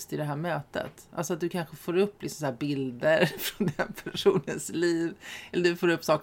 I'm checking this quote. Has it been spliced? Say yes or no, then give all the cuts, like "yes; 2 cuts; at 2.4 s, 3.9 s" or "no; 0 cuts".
no; 0 cuts